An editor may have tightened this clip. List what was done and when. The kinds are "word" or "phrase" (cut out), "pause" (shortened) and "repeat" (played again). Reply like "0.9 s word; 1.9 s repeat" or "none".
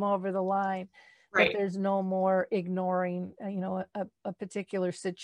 none

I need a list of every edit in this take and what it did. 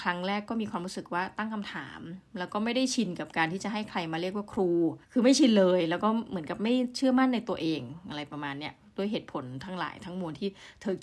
5.0 s pause

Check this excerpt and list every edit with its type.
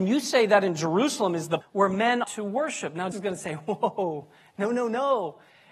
1.6 s word; 2.2 s word; 3.1 s word

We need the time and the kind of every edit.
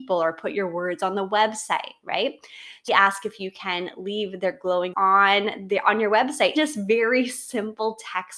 2.9 s word; 4.9 s word; 6.6 s word

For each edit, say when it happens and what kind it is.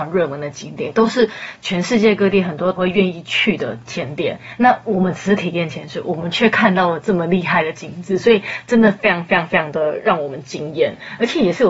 2.8 s word

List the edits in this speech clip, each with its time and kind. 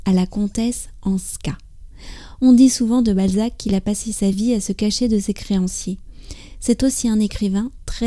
none

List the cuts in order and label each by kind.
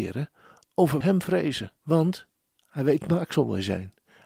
1.0 s word; 1.8 s pause; 3.0 s word

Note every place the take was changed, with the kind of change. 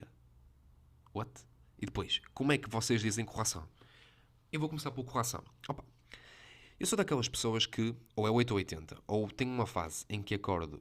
8.1 s pause

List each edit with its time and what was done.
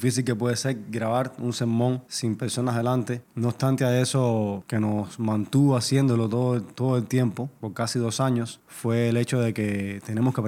4.6 s phrase

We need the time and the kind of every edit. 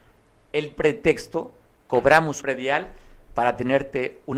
1.7 s word; 2.4 s word

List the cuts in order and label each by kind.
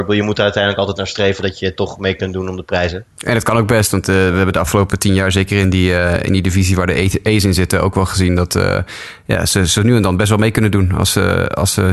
3.1 s pause

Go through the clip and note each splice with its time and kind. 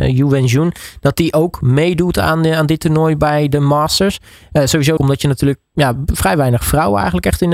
5.0 s word

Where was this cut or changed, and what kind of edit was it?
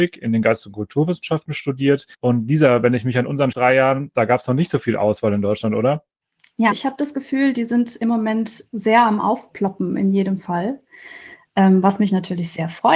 2.1 s pause; 3.5 s phrase; 6.7 s word

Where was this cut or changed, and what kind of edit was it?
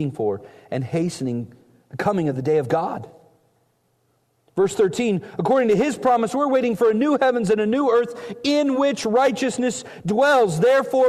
none

